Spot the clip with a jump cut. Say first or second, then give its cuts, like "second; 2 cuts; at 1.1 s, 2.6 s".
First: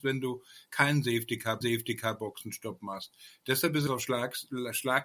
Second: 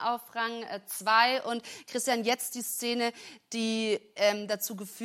first; 2 cuts; at 1.6 s, 3.9 s